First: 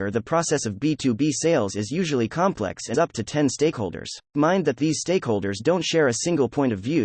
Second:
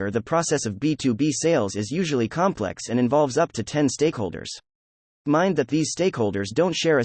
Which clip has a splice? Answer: first; 2 cuts; at 2.9 s, 4.2 s

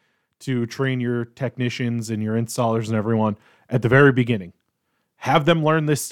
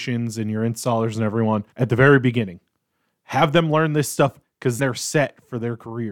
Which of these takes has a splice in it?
second; 3 cuts; at 1.7 s, 4.4 s, 4.8 s

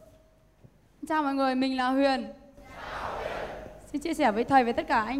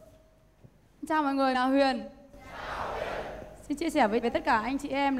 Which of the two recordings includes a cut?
second; 2 cuts; at 1.5 s, 4.2 s

